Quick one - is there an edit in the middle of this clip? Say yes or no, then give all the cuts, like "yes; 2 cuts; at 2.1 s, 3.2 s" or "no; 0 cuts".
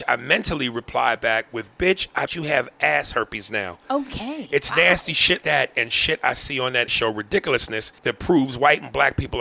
yes; 4 cuts; at 2.3 s, 5.4 s, 6.9 s, 8.0 s